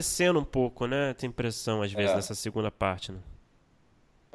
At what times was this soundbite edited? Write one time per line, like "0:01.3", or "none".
0:01.2